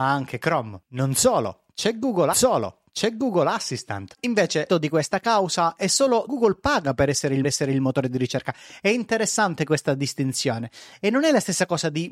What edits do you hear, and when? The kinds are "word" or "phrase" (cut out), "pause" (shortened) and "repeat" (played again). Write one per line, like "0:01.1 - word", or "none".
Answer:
0:02.3 - repeat
0:04.7 - word
0:06.3 - word
0:07.4 - repeat

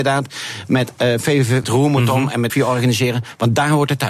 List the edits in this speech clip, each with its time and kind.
0:01.6 - phrase
0:02.5 - word

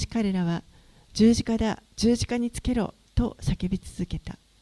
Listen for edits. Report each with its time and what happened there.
0:01.8 - pause

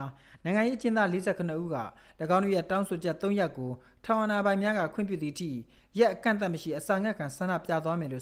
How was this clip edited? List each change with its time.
none

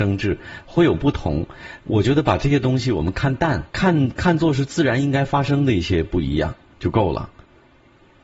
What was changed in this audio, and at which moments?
0:03.7 - pause

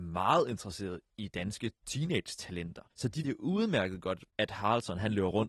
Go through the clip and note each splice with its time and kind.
0:02.9 - pause
0:03.2 - word
0:04.3 - pause

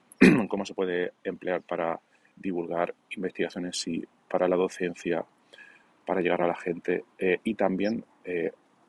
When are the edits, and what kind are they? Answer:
none

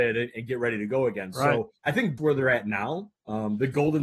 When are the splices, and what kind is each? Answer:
0:01.8 - pause
0:02.2 - word

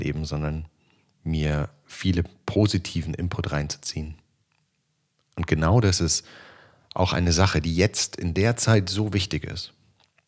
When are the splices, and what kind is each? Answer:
none

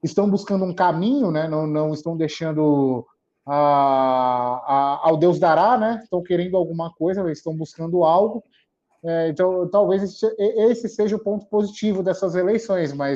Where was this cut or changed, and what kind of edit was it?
none

